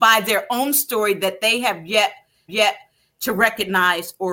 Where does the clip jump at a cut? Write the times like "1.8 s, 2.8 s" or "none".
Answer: 2.5 s

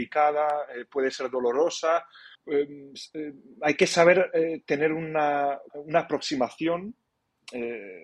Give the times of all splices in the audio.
2.3 s, 5.7 s

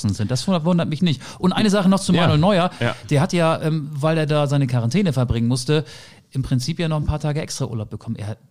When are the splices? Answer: none

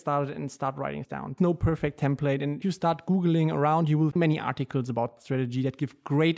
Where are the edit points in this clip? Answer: 1.0 s, 1.4 s, 2.6 s, 4.1 s, 5.2 s

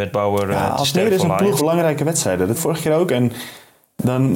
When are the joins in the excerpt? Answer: 1.6 s, 2.5 s

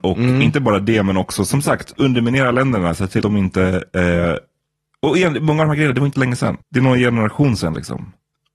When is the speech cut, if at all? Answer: 3.2 s, 6.1 s, 6.6 s

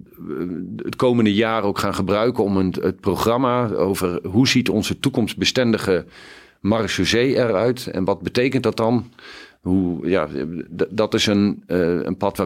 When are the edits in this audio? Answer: none

